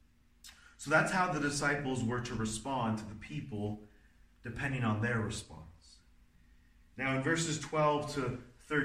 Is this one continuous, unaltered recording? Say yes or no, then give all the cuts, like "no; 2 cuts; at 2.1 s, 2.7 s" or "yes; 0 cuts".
yes; 0 cuts